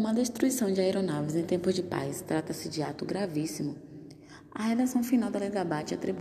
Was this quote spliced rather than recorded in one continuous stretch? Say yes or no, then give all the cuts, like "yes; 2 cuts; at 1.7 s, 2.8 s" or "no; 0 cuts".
no; 0 cuts